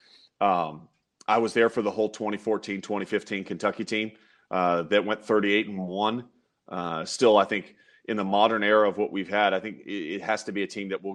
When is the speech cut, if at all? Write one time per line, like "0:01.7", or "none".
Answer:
none